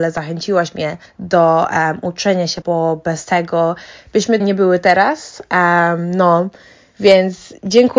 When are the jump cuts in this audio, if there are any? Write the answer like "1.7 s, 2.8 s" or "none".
1.1 s, 2.6 s, 4.4 s